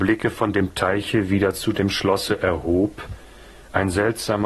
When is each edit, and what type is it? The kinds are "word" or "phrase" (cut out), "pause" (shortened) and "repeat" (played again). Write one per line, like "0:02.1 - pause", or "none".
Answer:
none

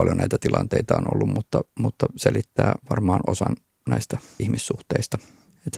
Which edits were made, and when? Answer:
0:01.7 - pause
0:02.8 - pause
0:04.4 - word

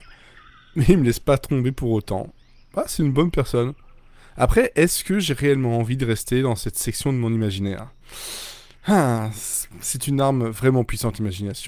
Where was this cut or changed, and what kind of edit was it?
none

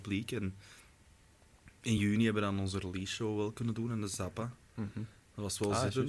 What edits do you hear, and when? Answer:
none

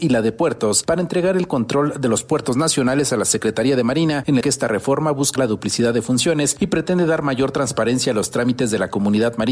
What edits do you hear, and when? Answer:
0:04.4 - phrase
0:05.4 - word

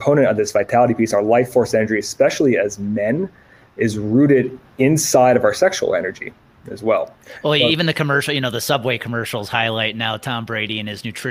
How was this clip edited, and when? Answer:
none

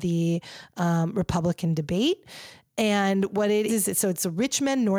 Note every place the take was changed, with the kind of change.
0:03.7 - word

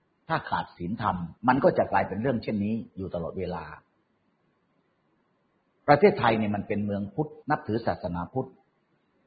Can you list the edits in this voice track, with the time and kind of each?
0:01.4 - pause
0:07.4 - pause

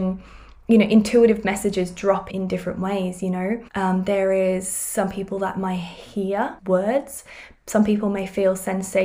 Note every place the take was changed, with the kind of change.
0:02.3 - word
0:03.7 - pause
0:06.6 - pause

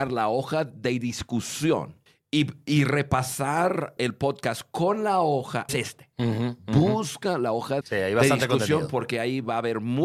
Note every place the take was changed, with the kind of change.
0:02.1 - pause
0:04.0 - word
0:05.7 - phrase
0:07.8 - word

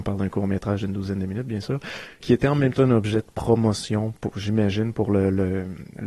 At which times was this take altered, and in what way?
0:02.2 - word

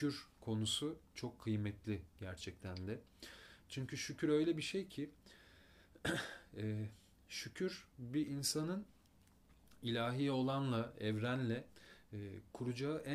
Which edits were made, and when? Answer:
none

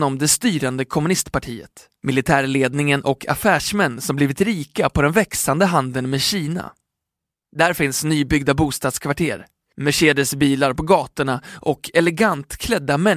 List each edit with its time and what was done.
none

